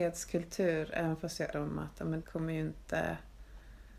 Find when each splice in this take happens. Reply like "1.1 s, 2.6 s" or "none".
1.5 s, 2.2 s

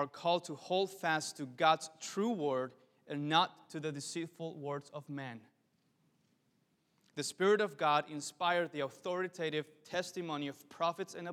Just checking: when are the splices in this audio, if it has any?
none

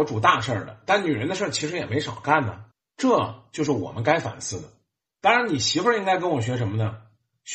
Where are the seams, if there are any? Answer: 2.7 s

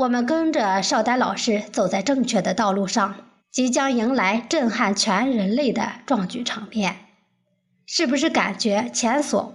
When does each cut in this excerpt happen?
3.4 s

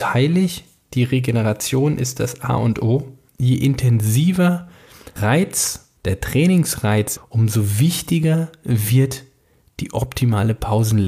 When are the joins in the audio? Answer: 3.3 s, 5.2 s, 6.0 s, 7.2 s

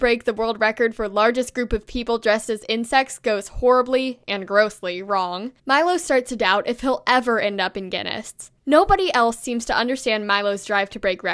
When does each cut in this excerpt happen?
5.6 s, 8.6 s

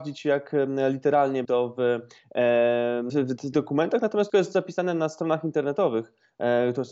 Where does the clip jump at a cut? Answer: 1.4 s, 3.1 s, 3.5 s, 4.3 s

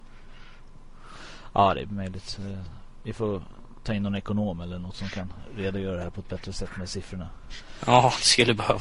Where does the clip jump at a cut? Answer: none

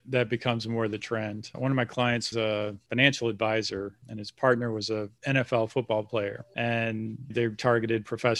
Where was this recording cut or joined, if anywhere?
2.3 s

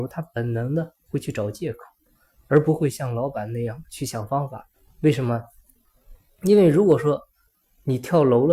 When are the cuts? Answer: 4.7 s

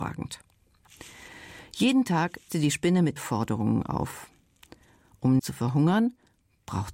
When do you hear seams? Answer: 2.5 s, 3.2 s, 5.4 s

